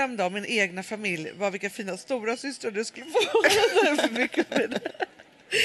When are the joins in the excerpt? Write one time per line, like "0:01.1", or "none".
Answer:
0:01.7

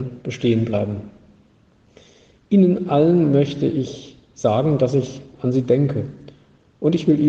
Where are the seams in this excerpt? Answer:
none

